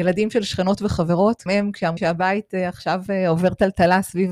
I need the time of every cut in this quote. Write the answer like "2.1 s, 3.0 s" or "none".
1.5 s, 2.0 s